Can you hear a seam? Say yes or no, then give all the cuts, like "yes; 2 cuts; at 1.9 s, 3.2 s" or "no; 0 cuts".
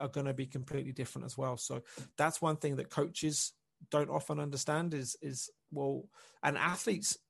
no; 0 cuts